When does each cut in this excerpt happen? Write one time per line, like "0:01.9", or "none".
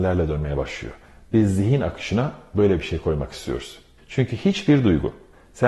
0:04.0